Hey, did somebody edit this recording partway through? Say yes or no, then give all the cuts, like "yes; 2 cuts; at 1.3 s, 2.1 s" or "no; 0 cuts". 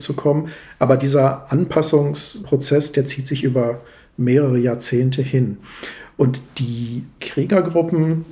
no; 0 cuts